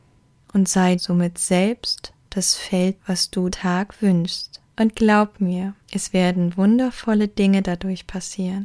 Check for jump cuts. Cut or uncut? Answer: cut